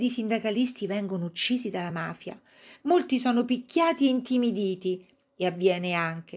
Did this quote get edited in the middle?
no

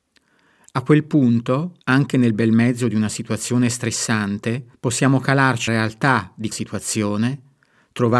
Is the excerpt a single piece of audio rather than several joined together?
no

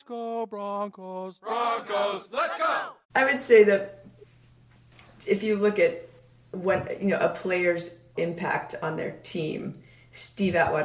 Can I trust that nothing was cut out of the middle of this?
no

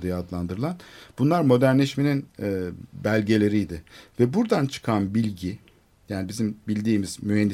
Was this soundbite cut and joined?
no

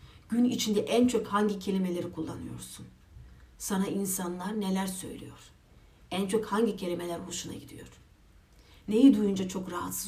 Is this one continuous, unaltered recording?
yes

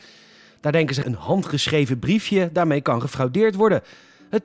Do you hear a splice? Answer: yes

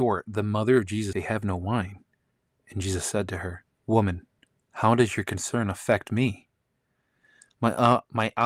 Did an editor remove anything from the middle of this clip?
yes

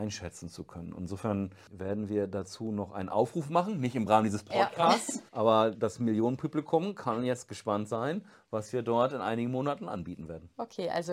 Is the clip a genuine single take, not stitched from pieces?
no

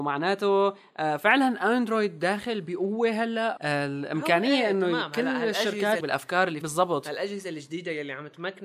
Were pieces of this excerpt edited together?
yes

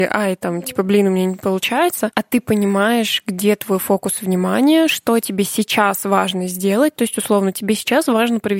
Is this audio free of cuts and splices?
yes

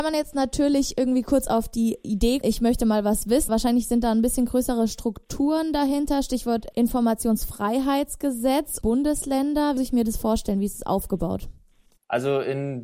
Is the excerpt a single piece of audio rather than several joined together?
no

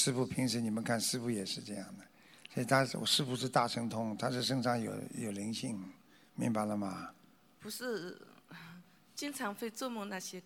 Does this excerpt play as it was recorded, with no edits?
yes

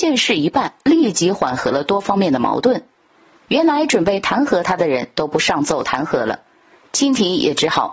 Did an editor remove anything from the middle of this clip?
no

